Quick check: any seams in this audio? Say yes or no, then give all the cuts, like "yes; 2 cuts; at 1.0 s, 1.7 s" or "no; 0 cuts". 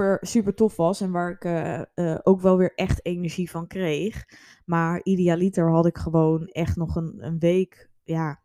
no; 0 cuts